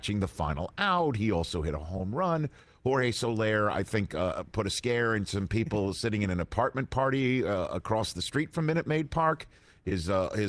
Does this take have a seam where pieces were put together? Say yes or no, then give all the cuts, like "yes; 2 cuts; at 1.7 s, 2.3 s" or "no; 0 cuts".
no; 0 cuts